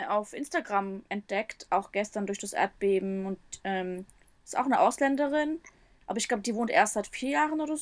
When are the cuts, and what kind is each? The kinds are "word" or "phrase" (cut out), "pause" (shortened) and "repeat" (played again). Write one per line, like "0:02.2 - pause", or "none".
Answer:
none